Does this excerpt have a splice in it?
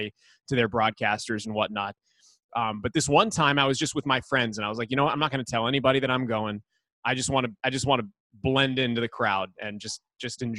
no; 0 cuts

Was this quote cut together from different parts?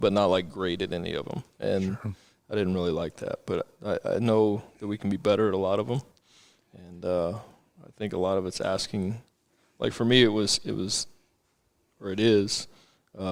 no; 0 cuts

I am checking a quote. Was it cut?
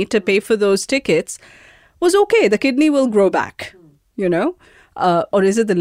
no; 0 cuts

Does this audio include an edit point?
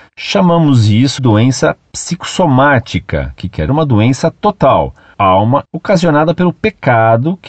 yes; 4 cuts; at 1.2 s, 3.7 s, 5.1 s, 5.6 s

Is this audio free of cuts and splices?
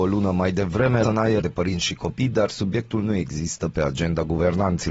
no; 2 cuts; at 1.0 s, 1.4 s

